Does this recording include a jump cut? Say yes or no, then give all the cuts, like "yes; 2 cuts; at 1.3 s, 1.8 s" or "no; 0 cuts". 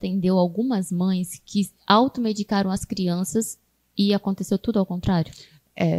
no; 0 cuts